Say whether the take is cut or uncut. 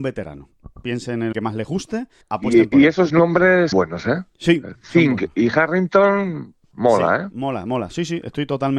cut